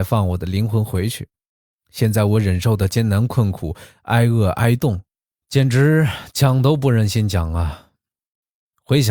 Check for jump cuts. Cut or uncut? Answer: uncut